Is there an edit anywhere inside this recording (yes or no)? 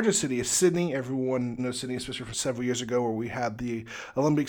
yes